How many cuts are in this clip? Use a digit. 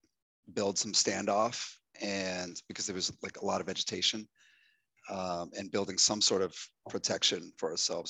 0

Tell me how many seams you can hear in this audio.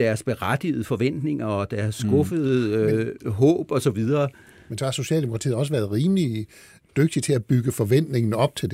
0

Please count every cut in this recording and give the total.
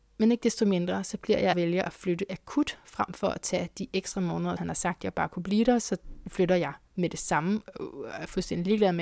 2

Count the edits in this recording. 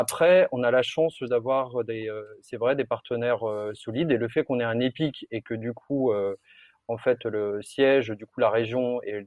0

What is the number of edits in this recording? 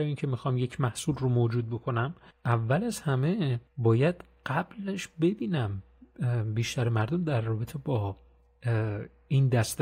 2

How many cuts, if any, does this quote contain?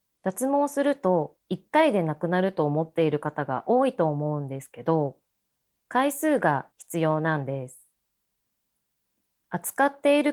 2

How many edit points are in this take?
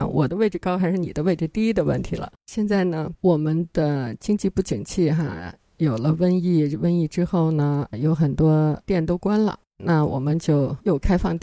2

